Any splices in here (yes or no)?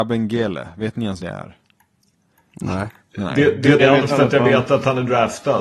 yes